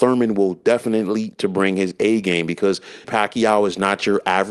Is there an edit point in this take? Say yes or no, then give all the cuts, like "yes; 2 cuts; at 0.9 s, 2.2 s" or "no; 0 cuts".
yes; 2 cuts; at 1.3 s, 3.0 s